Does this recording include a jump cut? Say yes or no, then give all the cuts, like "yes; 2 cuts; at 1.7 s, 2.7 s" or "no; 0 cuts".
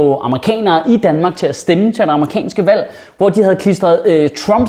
no; 0 cuts